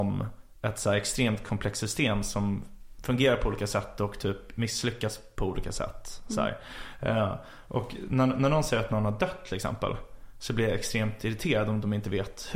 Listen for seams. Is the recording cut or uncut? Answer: uncut